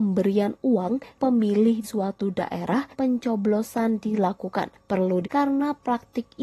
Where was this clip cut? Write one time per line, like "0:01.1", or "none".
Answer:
0:01.1
0:01.8
0:02.9
0:05.2